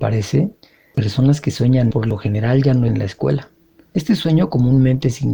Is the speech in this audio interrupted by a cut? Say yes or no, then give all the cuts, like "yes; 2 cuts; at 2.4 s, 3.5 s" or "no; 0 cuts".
yes; 3 cuts; at 0.9 s, 1.9 s, 2.9 s